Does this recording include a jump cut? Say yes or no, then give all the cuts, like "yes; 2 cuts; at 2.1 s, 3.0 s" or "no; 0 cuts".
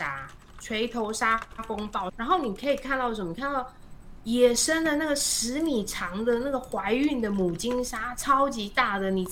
yes; 1 cut; at 2.1 s